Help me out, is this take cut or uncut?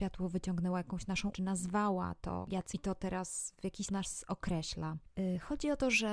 cut